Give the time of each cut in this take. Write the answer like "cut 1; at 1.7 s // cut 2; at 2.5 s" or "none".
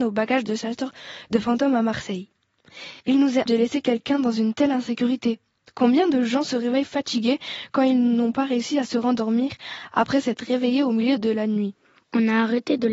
cut 1; at 3.0 s // cut 2; at 3.5 s